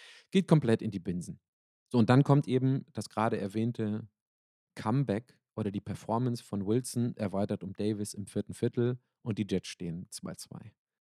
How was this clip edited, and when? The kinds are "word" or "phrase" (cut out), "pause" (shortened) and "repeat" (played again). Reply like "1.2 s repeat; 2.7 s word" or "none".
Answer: none